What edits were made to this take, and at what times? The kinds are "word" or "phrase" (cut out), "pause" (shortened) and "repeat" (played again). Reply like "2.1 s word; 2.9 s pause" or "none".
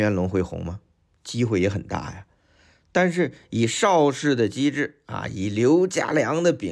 none